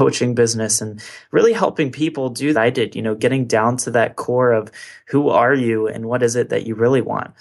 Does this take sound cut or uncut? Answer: cut